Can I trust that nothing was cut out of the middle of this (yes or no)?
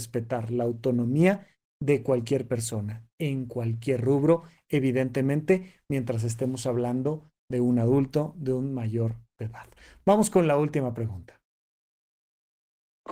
yes